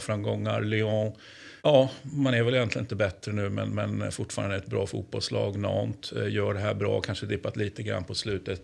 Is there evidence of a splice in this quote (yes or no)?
yes